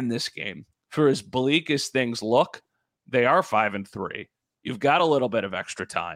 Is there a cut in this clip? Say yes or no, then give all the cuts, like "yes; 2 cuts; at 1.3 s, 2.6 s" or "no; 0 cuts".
no; 0 cuts